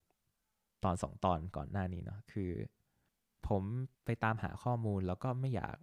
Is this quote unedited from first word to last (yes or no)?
no